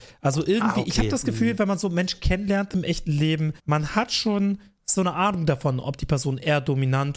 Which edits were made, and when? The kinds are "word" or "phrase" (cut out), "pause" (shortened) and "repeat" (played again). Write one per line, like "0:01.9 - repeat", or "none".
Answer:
0:03.6 - pause